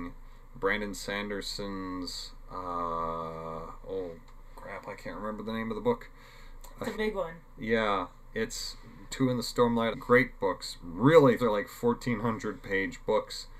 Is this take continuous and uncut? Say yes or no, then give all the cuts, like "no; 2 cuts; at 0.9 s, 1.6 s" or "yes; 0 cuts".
no; 4 cuts; at 6.9 s, 9.1 s, 9.9 s, 11.4 s